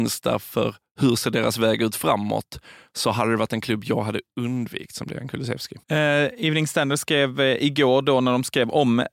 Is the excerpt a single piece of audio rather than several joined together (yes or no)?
no